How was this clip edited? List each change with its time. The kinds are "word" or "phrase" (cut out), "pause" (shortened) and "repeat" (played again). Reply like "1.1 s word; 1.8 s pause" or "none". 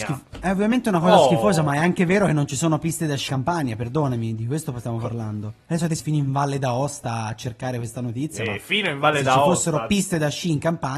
3.3 s word; 5.6 s pause; 6.0 s word